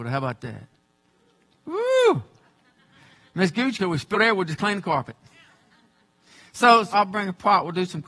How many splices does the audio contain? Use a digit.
3